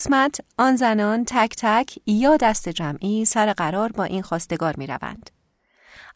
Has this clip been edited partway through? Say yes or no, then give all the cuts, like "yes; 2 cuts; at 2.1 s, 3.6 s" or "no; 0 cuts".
no; 0 cuts